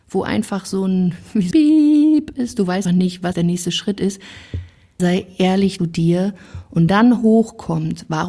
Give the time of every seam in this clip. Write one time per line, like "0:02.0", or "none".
0:01.5
0:02.8
0:03.3
0:05.0
0:05.8
0:06.9